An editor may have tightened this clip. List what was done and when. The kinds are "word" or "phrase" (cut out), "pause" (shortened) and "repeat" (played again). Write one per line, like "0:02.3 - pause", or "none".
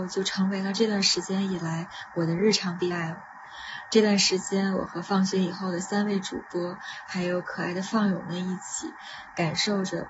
0:02.9 - word